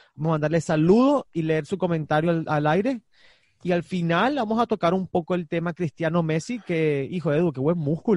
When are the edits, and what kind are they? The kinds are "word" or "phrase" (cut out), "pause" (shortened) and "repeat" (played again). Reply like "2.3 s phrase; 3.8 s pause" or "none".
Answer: none